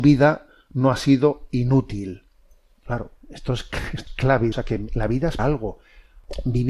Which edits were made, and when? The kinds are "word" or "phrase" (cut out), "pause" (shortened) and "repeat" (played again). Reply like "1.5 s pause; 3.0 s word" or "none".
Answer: 3.2 s pause; 4.1 s word; 4.5 s phrase; 5.4 s word